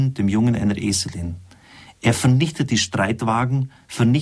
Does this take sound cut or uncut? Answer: uncut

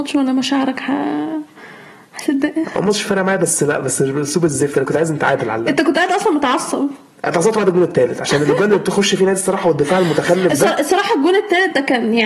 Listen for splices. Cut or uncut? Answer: uncut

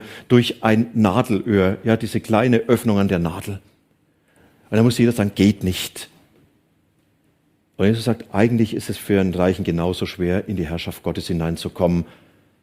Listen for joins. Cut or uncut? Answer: uncut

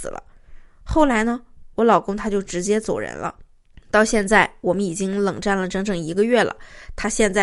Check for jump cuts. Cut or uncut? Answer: uncut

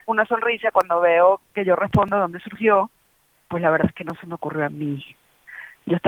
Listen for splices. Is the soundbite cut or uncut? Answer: uncut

